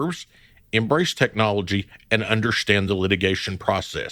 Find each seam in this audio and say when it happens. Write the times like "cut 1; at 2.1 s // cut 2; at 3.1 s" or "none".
none

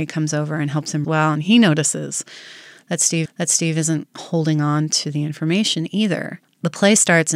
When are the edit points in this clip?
cut 1; at 1.0 s // cut 2; at 3.2 s

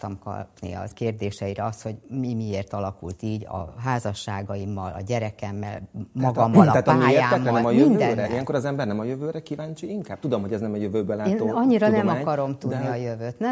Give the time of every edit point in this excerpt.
cut 1; at 0.9 s

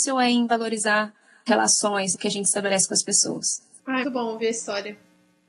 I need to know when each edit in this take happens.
cut 1; at 1.5 s // cut 2; at 2.1 s // cut 3; at 4.0 s

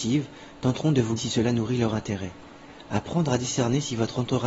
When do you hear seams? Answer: cut 1; at 1.2 s

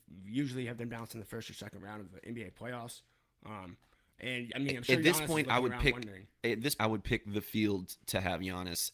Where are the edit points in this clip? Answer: cut 1; at 4.5 s // cut 2; at 6.8 s

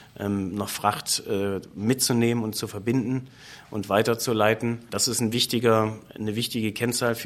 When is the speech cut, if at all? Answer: none

